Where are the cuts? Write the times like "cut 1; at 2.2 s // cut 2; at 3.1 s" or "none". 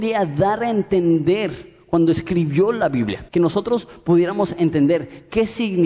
cut 1; at 3.3 s